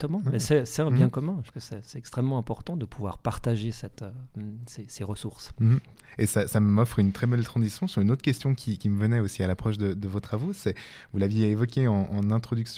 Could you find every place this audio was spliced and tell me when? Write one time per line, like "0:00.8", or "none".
0:01.5